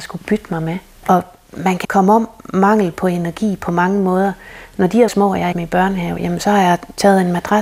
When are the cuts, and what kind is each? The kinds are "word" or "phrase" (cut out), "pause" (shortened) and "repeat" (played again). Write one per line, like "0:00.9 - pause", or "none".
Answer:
0:01.8 - word
0:05.1 - word
0:05.5 - word

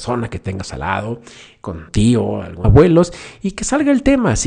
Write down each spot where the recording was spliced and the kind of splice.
0:01.9 - word
0:02.6 - word

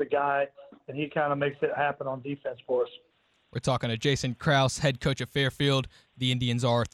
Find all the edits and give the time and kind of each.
none

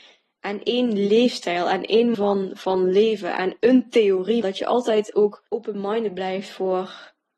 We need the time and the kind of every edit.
0:02.1 - word
0:04.4 - word
0:05.5 - pause

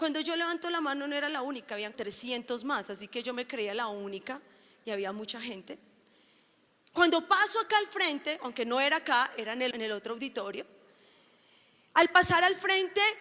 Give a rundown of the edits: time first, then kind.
0:01.9 - word
0:09.7 - word

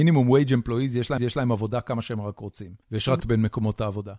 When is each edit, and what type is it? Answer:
0:01.2 - repeat
0:02.8 - pause
0:03.2 - word

